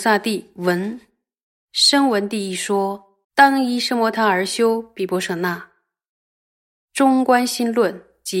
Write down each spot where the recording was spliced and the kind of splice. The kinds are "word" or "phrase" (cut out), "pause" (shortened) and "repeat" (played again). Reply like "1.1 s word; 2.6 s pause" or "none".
3.2 s pause